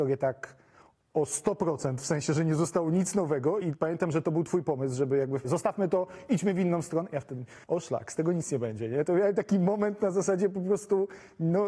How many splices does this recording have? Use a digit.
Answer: 3